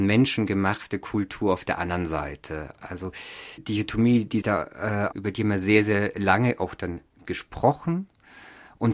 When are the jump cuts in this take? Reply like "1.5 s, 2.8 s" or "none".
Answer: 3.6 s, 4.4 s, 5.1 s